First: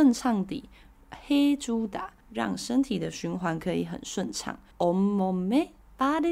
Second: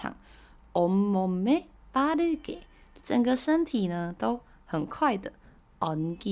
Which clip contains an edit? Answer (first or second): first